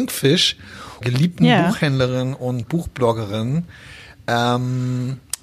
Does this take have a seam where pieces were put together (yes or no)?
yes